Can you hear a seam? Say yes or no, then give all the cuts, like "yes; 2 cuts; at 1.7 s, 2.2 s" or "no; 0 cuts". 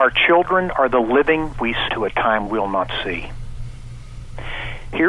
yes; 3 cuts; at 1.5 s, 1.9 s, 2.5 s